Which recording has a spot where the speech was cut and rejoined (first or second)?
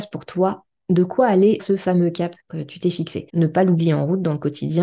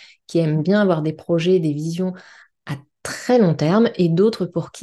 first